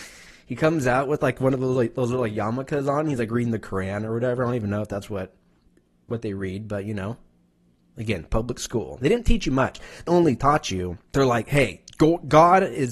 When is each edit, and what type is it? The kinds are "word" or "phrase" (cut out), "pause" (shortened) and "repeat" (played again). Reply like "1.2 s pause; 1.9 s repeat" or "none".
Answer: 10.1 s word; 11.1 s pause